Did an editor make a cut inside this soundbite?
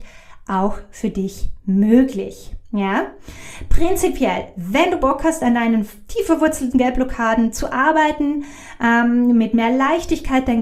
no; 0 cuts

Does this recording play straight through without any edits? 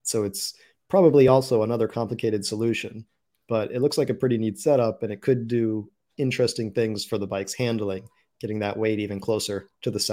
yes; 0 cuts

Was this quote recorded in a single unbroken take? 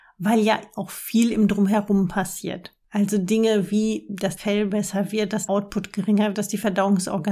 no; 3 cuts; at 4.4 s, 5.5 s, 6.3 s

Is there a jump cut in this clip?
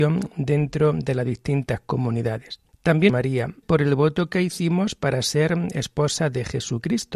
yes; 2 cuts; at 3.1 s, 3.6 s

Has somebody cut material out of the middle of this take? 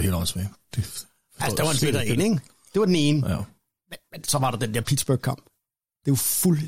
no; 0 cuts

